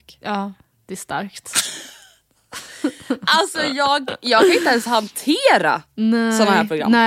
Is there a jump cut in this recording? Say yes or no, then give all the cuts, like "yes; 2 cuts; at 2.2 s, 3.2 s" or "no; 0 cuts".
no; 0 cuts